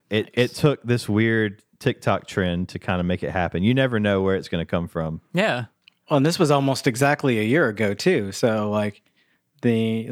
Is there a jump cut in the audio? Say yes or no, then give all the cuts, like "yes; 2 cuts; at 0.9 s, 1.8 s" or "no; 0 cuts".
no; 0 cuts